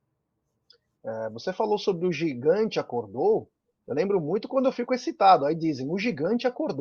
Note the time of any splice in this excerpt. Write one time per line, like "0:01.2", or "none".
none